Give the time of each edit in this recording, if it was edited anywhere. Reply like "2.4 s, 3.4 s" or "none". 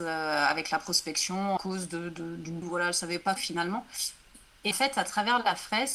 1.6 s, 2.6 s, 3.4 s, 4.7 s